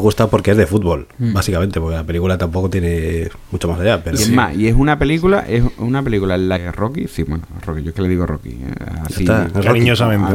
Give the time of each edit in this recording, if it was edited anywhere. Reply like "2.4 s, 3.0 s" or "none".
none